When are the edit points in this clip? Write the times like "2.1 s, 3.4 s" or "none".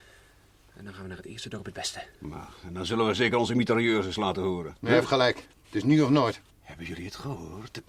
5.5 s, 6.5 s